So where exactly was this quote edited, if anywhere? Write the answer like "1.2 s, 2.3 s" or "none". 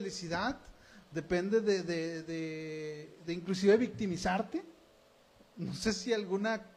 none